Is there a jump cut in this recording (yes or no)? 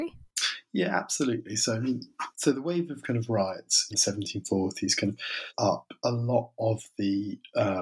yes